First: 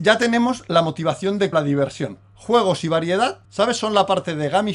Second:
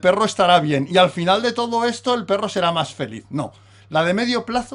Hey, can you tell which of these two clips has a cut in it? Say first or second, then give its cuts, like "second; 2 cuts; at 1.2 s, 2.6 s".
first; 2 cuts; at 1.5 s, 3.4 s